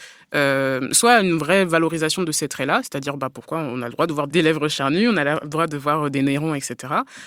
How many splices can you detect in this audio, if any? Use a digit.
1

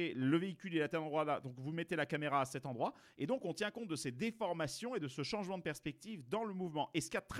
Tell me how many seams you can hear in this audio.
0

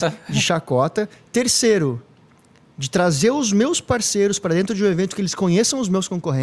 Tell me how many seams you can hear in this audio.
0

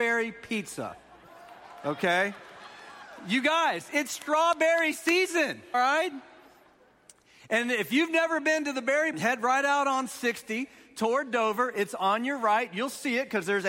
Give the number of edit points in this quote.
2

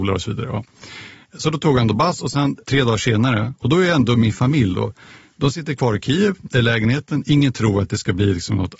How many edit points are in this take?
1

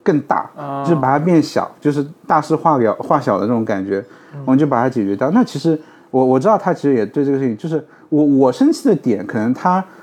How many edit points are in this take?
0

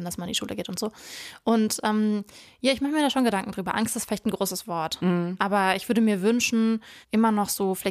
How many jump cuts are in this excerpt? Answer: 1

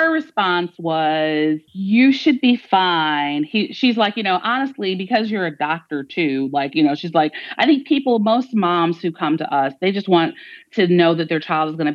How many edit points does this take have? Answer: 1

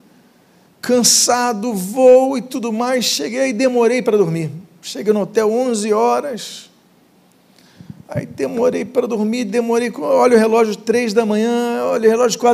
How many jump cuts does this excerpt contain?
0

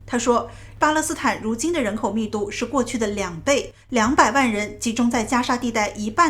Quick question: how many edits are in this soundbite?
1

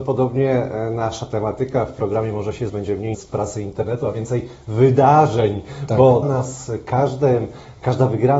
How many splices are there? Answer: 3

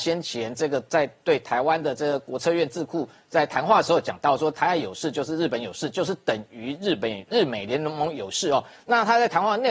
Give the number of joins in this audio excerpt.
1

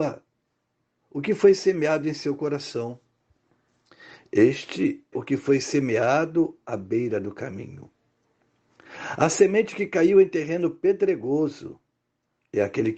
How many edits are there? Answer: 1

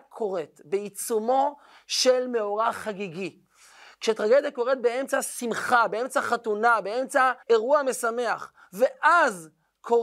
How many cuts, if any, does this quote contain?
1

